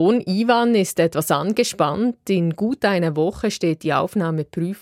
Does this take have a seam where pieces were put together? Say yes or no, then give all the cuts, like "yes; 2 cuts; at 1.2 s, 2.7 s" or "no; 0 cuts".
no; 0 cuts